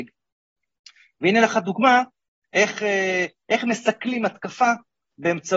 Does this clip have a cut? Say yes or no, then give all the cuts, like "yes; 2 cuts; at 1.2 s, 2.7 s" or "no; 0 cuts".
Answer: no; 0 cuts